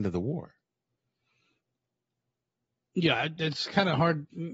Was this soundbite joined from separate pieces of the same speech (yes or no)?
no